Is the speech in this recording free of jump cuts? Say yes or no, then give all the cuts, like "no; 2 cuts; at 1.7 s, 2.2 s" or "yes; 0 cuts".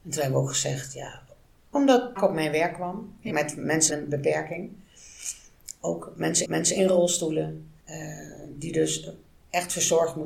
no; 6 cuts; at 1.7 s, 2.2 s, 3.3 s, 3.9 s, 6.4 s, 7.8 s